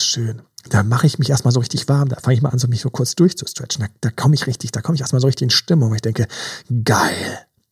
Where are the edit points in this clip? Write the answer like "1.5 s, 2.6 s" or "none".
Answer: none

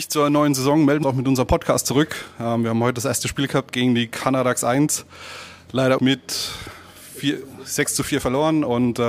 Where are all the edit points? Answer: 1.0 s, 6.0 s

